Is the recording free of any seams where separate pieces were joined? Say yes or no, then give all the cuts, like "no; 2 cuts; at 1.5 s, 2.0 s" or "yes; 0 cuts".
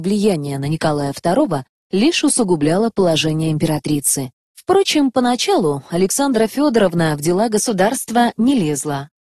yes; 0 cuts